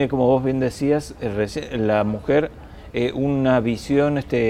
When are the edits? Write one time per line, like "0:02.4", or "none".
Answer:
none

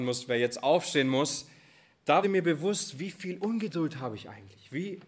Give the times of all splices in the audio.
0:02.2

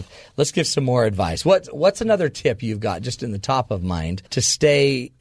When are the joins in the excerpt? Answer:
0:04.3

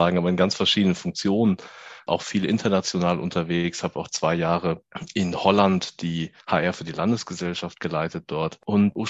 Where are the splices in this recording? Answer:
0:06.4

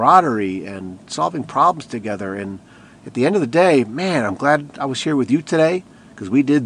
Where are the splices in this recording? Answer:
none

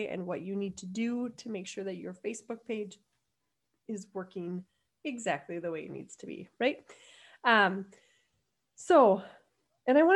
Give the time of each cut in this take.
none

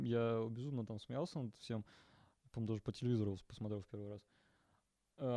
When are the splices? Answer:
none

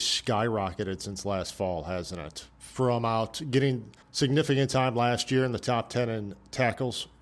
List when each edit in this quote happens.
0:04.0

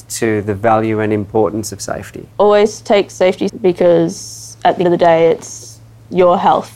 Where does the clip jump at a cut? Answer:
0:02.3
0:03.5
0:04.8

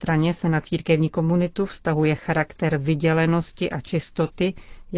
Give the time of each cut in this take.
none

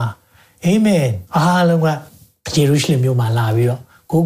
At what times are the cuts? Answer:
0:01.3

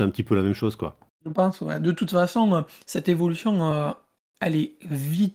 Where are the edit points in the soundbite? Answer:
none

